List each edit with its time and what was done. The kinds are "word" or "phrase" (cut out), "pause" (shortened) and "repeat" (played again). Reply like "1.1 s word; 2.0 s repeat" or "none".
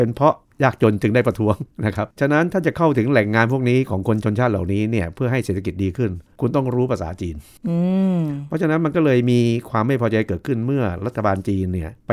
2.1 s pause